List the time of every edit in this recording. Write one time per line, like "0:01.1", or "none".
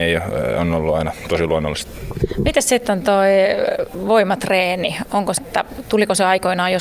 0:05.4